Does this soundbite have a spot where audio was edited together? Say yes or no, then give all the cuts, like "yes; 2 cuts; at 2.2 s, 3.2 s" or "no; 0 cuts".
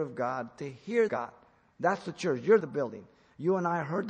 yes; 2 cuts; at 1.1 s, 2.6 s